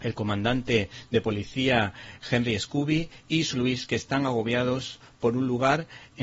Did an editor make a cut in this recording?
yes; 1 cut; at 3.5 s

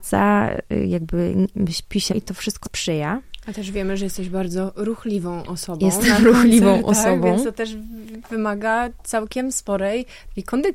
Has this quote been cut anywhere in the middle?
yes; 2 cuts; at 2.1 s, 2.6 s

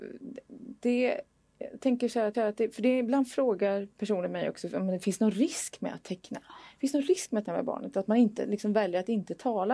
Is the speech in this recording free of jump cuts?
no; 2 cuts; at 2.3 s, 7.5 s

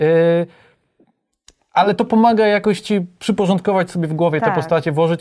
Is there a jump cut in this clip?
no; 0 cuts

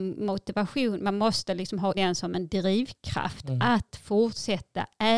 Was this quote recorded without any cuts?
no; 1 cut; at 1.9 s

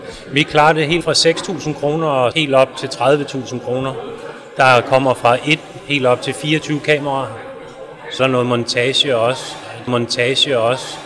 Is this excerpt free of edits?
no; 4 cuts; at 1.0 s, 2.3 s, 8.2 s, 9.9 s

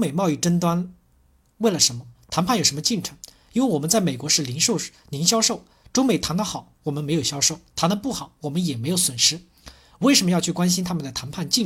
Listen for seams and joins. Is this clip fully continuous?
yes; 0 cuts

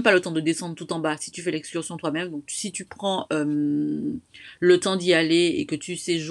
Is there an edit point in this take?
no; 0 cuts

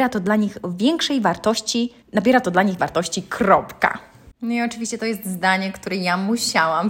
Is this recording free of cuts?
no; 2 cuts; at 2.0 s, 2.8 s

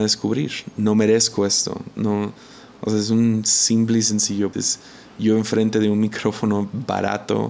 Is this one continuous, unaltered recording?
no; 1 cut; at 4.5 s

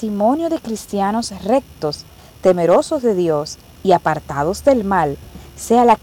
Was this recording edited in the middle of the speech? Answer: no; 0 cuts

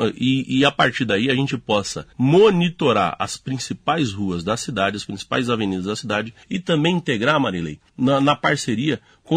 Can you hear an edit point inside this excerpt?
yes; 3 cuts; at 2.1 s, 6.4 s, 7.9 s

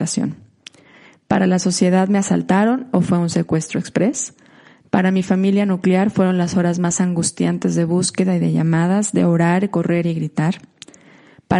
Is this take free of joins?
yes; 0 cuts

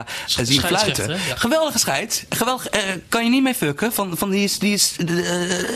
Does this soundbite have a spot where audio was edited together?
no; 0 cuts

